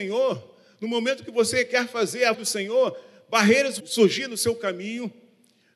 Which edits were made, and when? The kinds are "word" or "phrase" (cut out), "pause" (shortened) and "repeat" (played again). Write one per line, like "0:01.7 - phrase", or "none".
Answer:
0:02.3 - word
0:03.8 - word